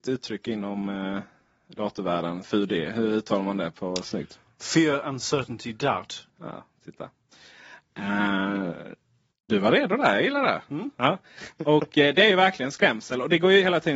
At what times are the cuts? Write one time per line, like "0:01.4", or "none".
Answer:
0:02.4
0:06.3